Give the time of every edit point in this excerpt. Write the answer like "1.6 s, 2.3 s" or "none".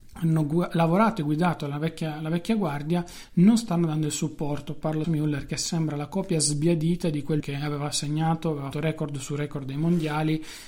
5.0 s, 7.4 s, 8.7 s